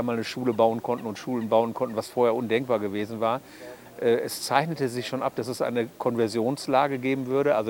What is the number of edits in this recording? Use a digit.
0